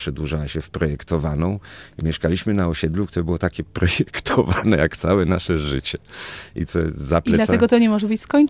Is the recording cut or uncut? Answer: uncut